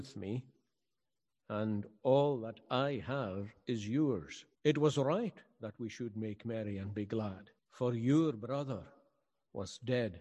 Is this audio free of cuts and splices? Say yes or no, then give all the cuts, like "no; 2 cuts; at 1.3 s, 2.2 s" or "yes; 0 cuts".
no; 2 cuts; at 4.5 s, 7.6 s